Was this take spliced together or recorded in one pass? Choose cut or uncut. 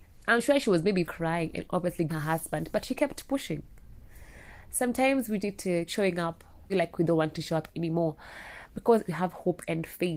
cut